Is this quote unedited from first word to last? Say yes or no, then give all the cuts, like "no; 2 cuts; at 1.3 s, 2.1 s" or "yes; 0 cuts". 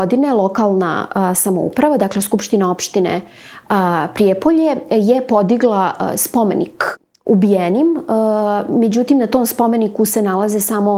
yes; 0 cuts